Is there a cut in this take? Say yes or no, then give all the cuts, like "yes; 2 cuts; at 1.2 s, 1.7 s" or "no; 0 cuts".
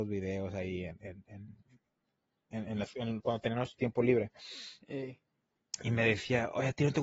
no; 0 cuts